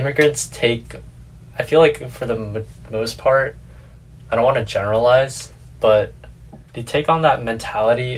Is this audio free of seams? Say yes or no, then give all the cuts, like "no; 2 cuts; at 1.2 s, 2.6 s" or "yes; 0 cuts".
no; 1 cut; at 6.7 s